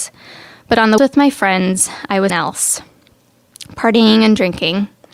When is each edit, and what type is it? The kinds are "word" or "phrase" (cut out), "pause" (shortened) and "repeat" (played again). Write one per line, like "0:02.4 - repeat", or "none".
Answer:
0:01.0 - word
0:02.3 - word